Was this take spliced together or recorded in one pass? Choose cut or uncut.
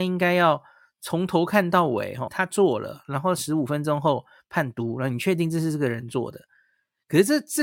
cut